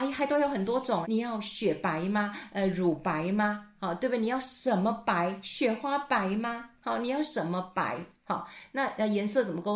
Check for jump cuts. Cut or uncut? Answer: cut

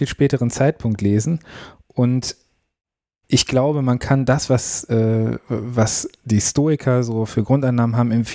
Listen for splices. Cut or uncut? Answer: uncut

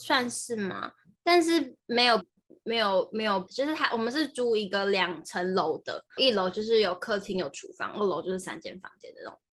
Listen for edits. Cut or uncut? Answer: cut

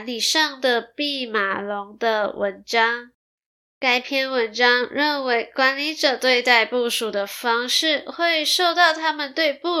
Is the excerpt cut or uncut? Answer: cut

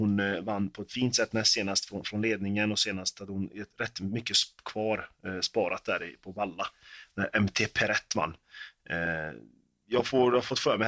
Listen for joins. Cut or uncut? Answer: uncut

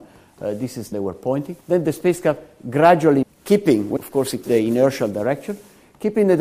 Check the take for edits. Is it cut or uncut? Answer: cut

